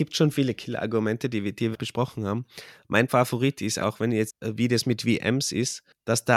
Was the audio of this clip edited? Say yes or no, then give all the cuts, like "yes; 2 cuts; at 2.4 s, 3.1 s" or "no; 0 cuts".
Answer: yes; 4 cuts; at 1.7 s, 3.1 s, 3.8 s, 4.3 s